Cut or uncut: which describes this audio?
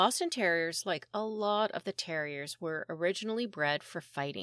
uncut